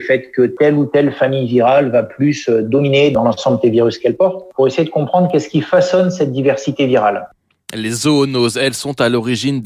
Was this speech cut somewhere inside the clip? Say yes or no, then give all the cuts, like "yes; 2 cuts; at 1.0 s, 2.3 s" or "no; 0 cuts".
no; 0 cuts